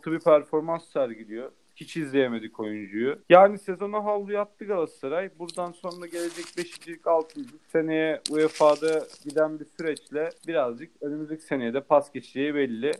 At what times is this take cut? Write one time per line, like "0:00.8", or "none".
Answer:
0:03.2
0:09.2
0:10.4